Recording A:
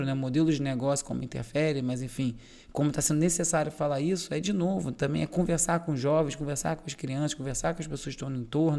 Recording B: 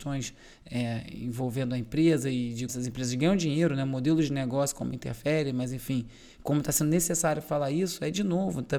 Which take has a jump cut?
B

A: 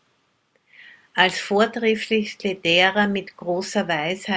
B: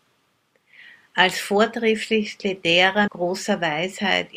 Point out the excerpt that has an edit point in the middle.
B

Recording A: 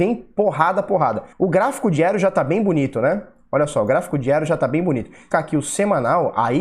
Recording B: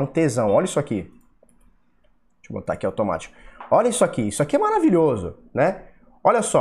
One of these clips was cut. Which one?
A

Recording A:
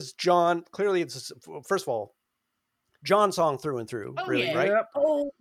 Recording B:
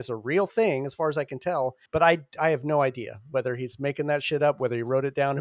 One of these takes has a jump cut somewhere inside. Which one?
B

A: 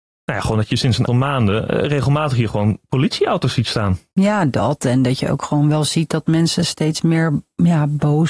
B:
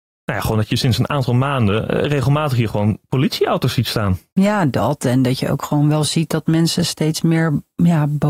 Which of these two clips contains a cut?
A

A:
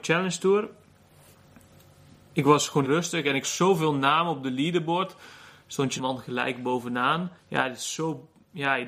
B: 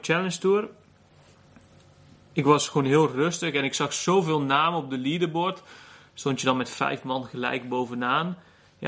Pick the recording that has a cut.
A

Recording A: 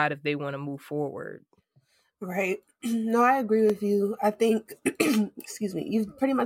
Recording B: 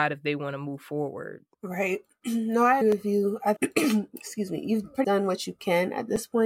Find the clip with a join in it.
B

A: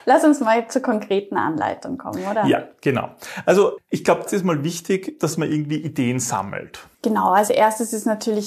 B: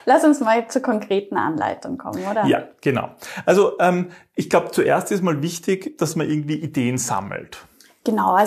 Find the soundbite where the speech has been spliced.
A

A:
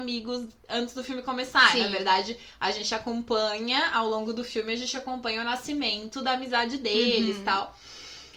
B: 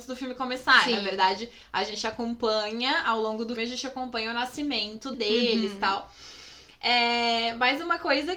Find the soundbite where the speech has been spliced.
B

